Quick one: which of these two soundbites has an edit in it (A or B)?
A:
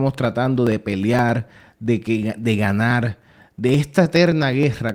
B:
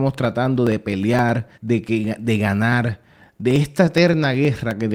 B